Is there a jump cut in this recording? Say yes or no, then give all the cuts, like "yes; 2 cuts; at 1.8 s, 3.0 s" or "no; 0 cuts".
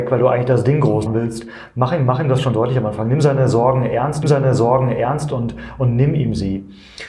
yes; 2 cuts; at 1.1 s, 4.2 s